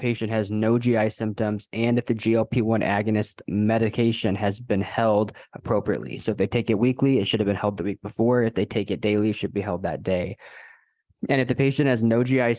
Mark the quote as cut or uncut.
uncut